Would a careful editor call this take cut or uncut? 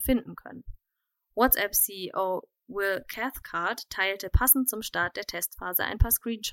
uncut